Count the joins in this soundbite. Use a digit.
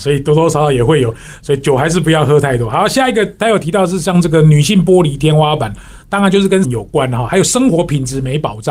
1